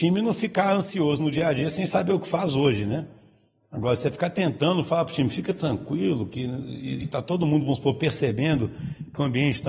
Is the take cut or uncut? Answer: uncut